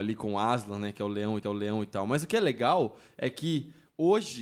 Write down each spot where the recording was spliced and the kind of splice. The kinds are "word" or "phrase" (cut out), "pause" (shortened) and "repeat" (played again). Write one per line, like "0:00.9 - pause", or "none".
0:01.4 - repeat